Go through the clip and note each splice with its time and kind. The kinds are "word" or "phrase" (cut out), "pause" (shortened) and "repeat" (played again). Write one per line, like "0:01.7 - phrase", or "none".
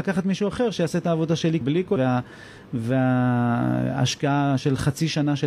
0:01.6 - word
0:02.0 - word